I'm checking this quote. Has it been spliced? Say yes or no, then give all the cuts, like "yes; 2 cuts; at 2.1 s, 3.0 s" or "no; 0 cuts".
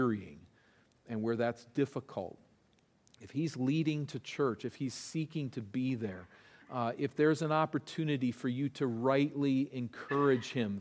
no; 0 cuts